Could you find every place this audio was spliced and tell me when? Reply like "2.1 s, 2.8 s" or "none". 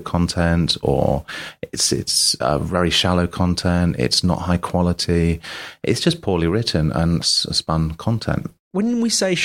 none